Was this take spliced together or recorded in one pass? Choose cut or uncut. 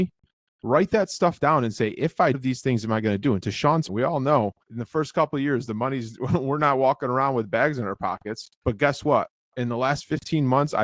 cut